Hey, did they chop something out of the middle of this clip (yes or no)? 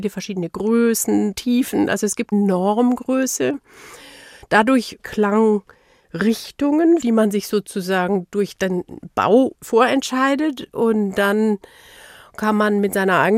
yes